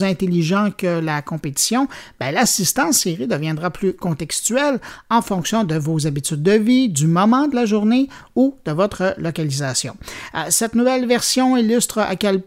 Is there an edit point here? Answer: no; 0 cuts

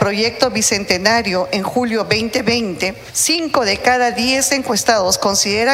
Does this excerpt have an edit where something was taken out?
no; 0 cuts

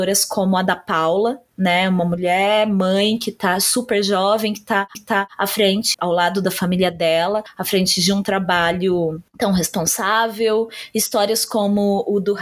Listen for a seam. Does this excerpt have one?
yes; 3 cuts; at 4.9 s, 5.9 s, 9.3 s

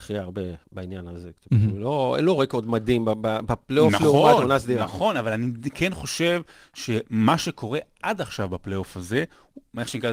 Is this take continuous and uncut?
yes; 0 cuts

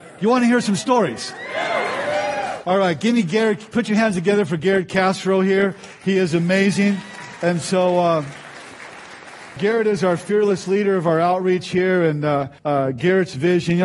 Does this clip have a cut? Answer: yes; 2 cuts; at 9.6 s, 12.6 s

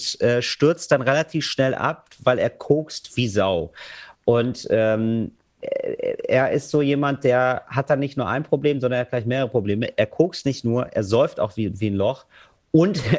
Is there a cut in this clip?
no; 0 cuts

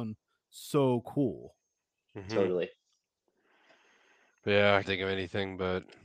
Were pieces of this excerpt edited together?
yes; 1 cut; at 4.8 s

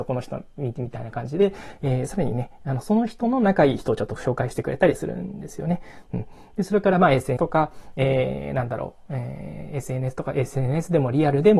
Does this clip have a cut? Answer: yes; 1 cut; at 7.4 s

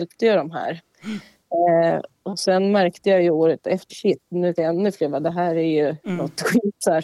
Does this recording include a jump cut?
yes; 3 cuts; at 3.9 s, 4.6 s, 6.0 s

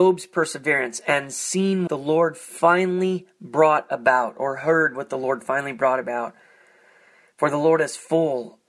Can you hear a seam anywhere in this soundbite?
yes; 1 cut; at 1.9 s

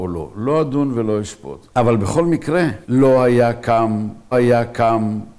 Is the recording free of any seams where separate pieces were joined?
no; 2 cuts; at 2.8 s, 4.3 s

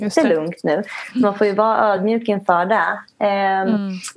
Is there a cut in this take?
no; 0 cuts

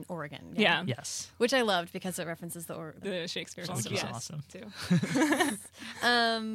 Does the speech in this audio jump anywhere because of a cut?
yes; 3 cuts; at 3.0 s, 3.7 s, 4.5 s

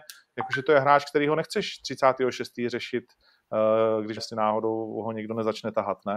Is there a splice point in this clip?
yes; 1 cut; at 4.2 s

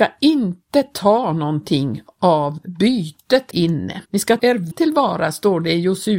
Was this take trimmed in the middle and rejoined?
yes; 4 cuts; at 3.5 s, 4.0 s, 4.4 s, 4.7 s

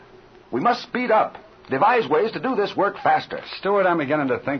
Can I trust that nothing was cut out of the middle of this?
yes; 0 cuts

